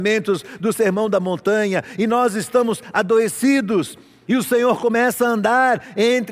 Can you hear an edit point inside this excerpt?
no; 0 cuts

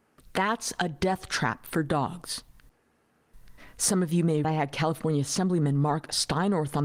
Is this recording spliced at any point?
yes; 1 cut; at 4.4 s

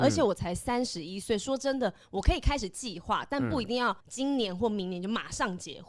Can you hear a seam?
yes; 1 cut; at 4.0 s

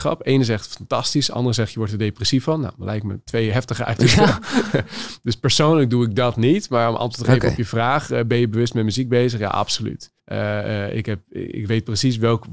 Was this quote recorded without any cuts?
no; 1 cut; at 10.2 s

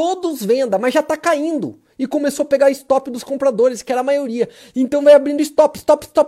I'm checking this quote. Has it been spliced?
no; 0 cuts

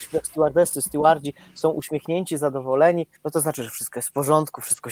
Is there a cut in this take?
yes; 1 cut; at 3.2 s

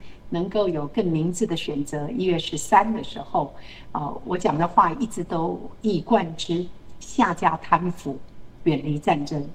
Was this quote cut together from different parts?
no; 0 cuts

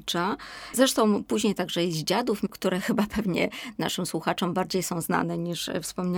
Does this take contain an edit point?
no; 0 cuts

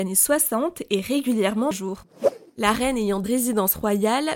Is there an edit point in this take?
yes; 2 cuts; at 1.7 s, 3.2 s

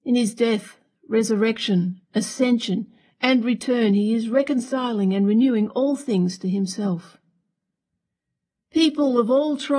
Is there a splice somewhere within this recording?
no; 0 cuts

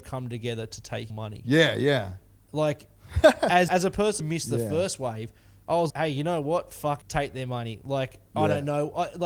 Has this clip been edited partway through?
yes; 5 cuts; at 1.1 s, 3.7 s, 4.2 s, 5.9 s, 7.0 s

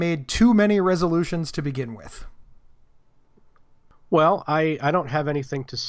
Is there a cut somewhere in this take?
no; 0 cuts

